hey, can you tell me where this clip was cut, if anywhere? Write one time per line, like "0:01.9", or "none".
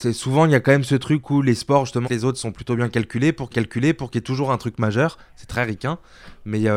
0:02.0
0:03.5